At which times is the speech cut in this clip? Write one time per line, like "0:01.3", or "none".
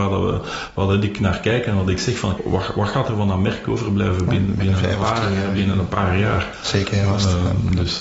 0:02.4